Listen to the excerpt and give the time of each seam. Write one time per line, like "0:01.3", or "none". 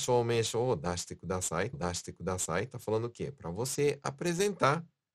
0:01.7